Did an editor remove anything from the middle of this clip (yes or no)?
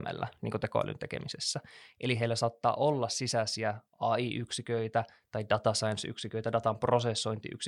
yes